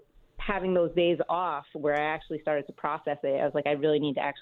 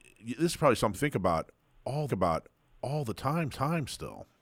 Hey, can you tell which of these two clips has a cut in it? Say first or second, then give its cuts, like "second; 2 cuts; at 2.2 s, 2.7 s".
second; 3 cuts; at 0.9 s, 2.1 s, 3.5 s